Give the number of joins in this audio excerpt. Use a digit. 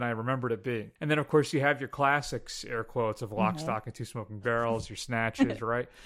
1